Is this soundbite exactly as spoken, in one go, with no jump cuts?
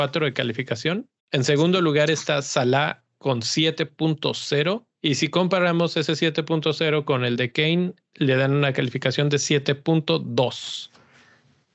no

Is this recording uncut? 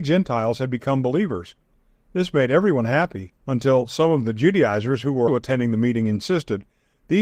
no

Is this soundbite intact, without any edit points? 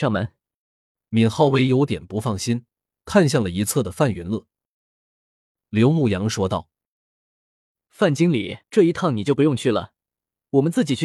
no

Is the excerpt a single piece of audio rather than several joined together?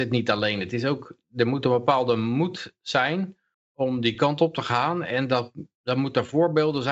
yes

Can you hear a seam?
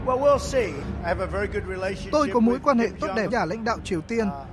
yes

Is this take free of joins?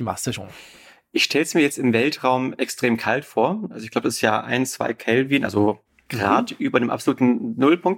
yes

